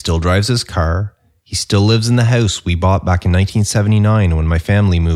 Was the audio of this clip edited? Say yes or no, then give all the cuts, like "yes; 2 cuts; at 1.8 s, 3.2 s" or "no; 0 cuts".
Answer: no; 0 cuts